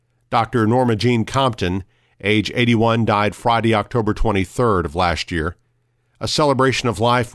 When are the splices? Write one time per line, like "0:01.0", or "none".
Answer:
none